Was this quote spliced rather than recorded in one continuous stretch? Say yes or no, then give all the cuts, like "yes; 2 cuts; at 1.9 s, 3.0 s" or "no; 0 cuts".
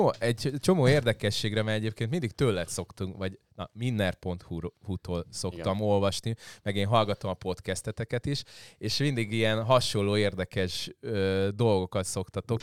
no; 0 cuts